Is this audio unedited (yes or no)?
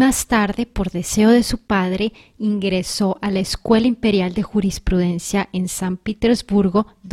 yes